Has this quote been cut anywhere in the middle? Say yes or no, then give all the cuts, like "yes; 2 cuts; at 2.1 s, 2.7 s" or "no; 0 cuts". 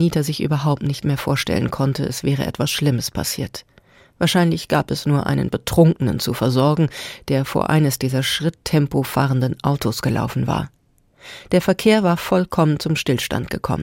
no; 0 cuts